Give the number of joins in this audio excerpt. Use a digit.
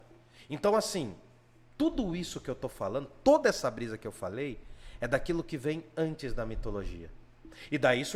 0